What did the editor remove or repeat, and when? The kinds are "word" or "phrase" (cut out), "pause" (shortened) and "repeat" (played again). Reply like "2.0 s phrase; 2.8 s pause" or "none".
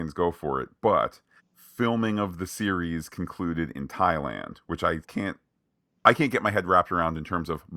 1.4 s pause; 5.0 s word